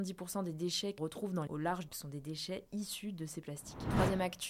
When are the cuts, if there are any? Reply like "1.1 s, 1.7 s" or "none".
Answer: 1.0 s, 1.5 s, 1.9 s